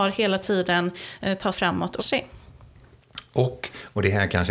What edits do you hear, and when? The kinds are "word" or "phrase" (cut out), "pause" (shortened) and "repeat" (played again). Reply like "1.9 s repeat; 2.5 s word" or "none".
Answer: 1.5 s word; 2.0 s word